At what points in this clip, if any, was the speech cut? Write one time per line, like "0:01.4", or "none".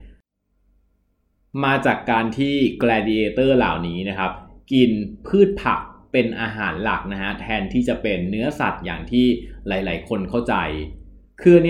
none